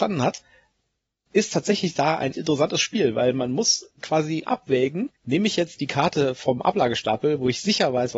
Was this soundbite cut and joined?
yes; 2 cuts; at 2.3 s, 5.2 s

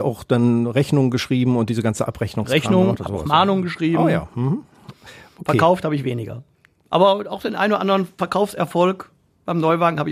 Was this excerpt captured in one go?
yes; 0 cuts

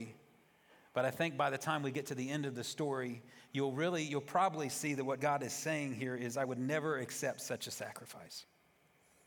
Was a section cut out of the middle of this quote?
no; 0 cuts

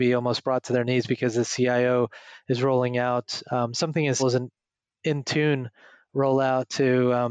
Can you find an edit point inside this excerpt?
yes; 1 cut; at 4.2 s

